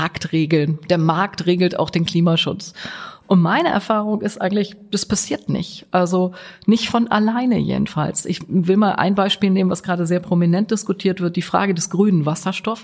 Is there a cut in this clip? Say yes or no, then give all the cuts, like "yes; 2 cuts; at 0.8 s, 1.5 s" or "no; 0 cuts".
no; 0 cuts